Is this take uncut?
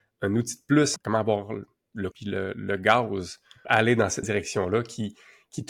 no; 4 cuts; at 1.0 s, 2.1 s, 3.6 s, 4.2 s

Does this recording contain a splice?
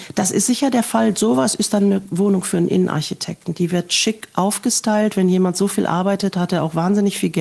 no; 0 cuts

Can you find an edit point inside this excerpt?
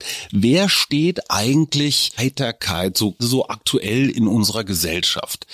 yes; 2 cuts; at 2.2 s, 3.2 s

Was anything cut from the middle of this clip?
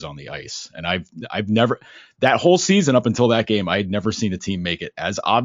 no; 0 cuts

